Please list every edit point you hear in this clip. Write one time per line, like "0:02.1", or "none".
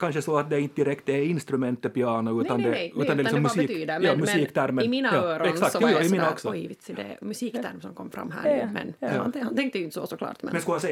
none